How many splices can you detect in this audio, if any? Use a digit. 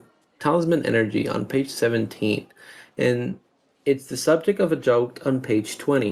0